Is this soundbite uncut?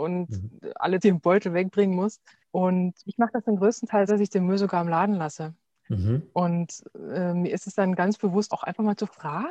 no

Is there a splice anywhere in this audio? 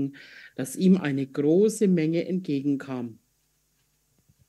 no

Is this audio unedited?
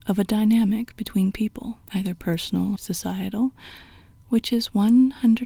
no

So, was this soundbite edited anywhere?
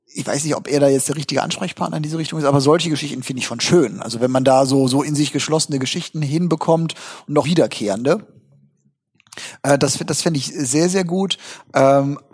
yes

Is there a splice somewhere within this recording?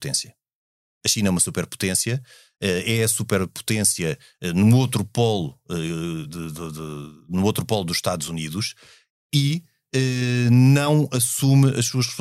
no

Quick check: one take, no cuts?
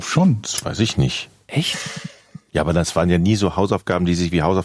yes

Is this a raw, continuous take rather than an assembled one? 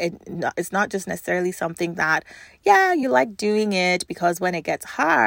yes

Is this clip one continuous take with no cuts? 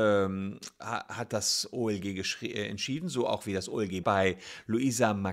no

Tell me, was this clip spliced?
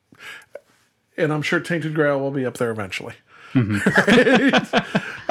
no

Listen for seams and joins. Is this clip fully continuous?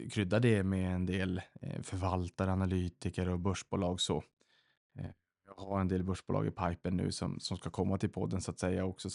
yes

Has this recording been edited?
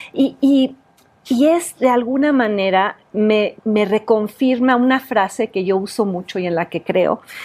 yes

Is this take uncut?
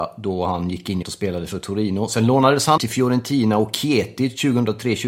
no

